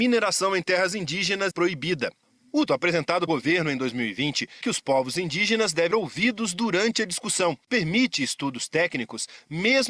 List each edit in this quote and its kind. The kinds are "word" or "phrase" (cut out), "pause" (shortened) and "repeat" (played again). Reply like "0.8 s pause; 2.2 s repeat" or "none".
1.5 s word; 2.7 s word; 3.3 s word; 4.6 s word; 5.9 s word; 7.7 s word

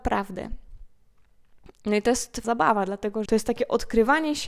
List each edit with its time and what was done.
2.4 s word; 3.3 s word

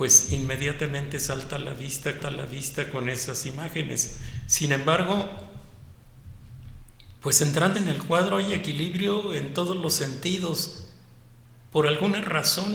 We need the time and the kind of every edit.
2.2 s repeat; 7.2 s pause; 7.7 s word

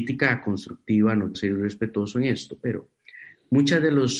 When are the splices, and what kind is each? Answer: 1.3 s word

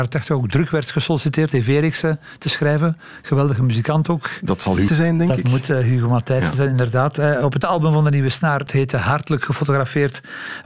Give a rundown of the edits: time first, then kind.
1.5 s word; 4.9 s word; 7.6 s word; 8.7 s word

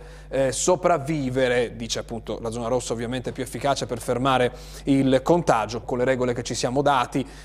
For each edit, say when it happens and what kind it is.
5.8 s word

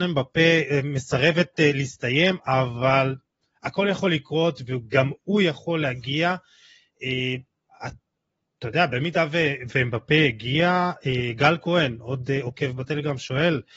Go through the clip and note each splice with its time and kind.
none

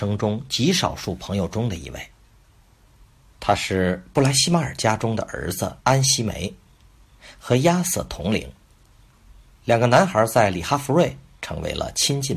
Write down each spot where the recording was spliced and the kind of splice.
5.8 s pause

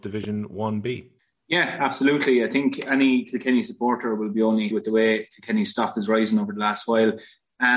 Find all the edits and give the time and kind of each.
1.2 s pause; 4.7 s word

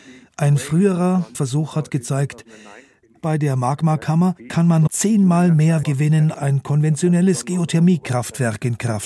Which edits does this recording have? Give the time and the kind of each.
1.3 s word; 4.9 s word; 5.8 s word; 6.3 s word

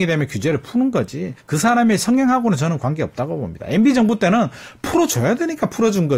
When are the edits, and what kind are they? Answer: 1.4 s pause

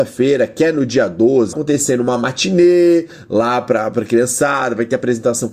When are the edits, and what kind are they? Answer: 1.5 s phrase

